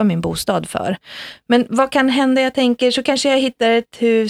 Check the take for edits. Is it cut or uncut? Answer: uncut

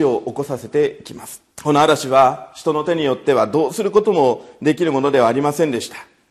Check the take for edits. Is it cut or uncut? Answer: cut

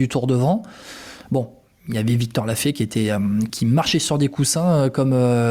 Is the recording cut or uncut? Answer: cut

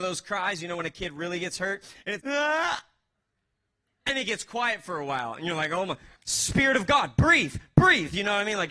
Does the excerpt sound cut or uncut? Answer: cut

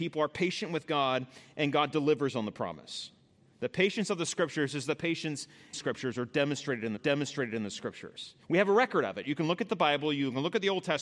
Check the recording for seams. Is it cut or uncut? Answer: cut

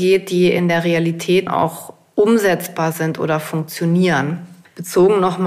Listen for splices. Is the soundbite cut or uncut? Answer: cut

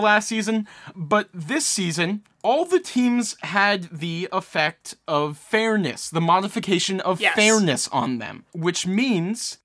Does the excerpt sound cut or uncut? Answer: uncut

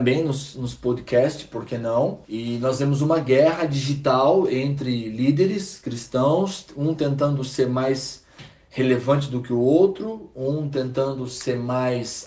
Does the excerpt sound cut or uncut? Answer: cut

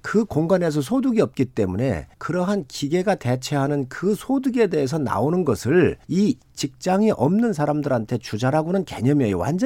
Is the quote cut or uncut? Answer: cut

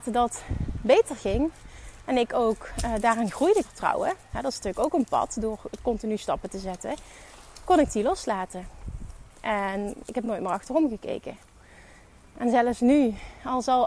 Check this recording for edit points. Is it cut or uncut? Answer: cut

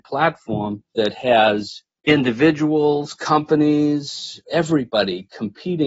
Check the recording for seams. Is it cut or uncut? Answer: uncut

